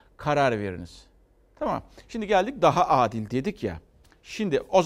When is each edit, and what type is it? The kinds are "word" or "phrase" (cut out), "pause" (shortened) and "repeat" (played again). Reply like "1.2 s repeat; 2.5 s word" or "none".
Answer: none